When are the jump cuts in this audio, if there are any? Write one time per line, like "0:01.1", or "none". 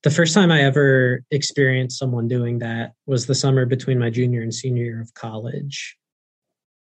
0:03.0